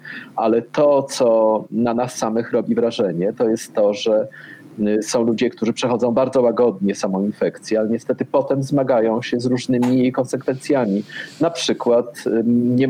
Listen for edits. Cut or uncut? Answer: uncut